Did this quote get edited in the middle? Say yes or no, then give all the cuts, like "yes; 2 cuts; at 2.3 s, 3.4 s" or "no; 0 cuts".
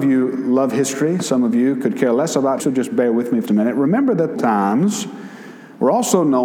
yes; 3 cuts; at 2.6 s, 3.4 s, 4.3 s